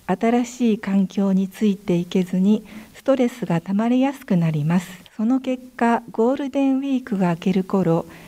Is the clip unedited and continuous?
no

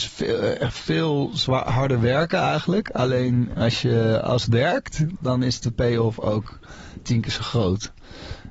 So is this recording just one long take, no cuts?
no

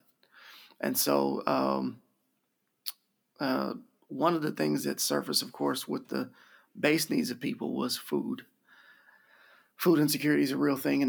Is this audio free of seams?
yes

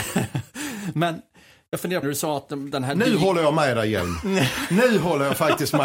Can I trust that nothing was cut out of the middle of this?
no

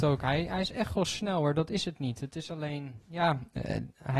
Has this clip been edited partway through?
no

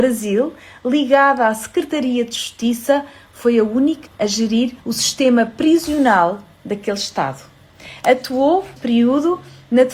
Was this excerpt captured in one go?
no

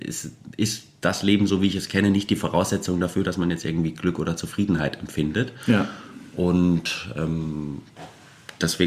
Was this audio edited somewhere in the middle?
no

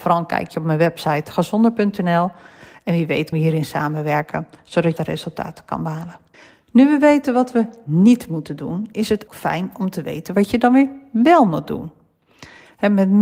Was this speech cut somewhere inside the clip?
yes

